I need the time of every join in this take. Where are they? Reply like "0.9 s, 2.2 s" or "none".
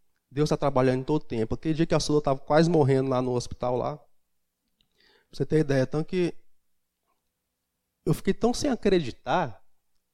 none